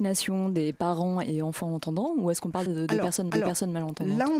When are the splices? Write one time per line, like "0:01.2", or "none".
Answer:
0:02.7
0:03.3